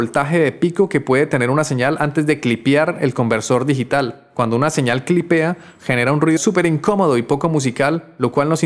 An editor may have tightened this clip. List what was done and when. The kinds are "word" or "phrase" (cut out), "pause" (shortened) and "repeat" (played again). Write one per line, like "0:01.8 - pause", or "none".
0:06.4 - word